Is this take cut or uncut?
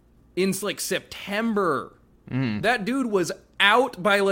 uncut